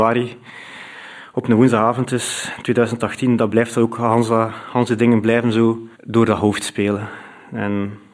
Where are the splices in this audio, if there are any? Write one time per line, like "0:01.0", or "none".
0:05.9